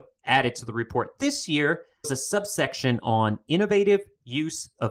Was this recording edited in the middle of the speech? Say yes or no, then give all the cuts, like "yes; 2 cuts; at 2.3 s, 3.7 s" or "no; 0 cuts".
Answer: yes; 1 cut; at 2.0 s